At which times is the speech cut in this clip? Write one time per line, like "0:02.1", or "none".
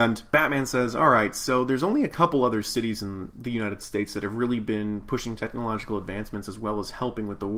none